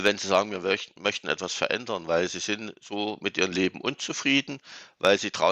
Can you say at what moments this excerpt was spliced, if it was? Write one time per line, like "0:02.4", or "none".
none